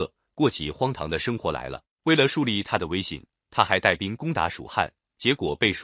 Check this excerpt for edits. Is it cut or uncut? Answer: cut